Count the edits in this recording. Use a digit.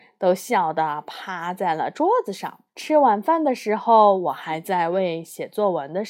1